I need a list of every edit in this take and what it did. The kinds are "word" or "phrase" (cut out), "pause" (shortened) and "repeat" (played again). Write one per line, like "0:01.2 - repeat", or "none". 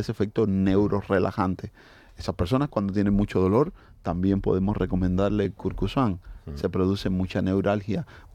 none